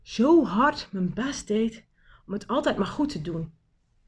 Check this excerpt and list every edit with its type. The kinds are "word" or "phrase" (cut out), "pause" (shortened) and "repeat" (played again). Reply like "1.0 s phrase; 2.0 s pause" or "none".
none